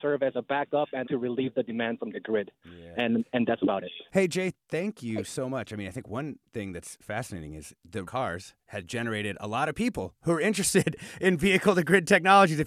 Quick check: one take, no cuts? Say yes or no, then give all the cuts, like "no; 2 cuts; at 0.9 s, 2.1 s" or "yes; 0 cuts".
no; 4 cuts; at 1.0 s, 4.1 s, 7.0 s, 8.0 s